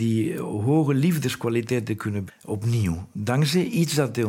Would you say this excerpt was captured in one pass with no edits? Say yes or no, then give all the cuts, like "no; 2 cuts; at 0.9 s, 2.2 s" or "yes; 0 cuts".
no; 1 cut; at 2.3 s